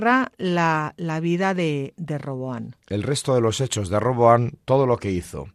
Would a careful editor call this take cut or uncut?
cut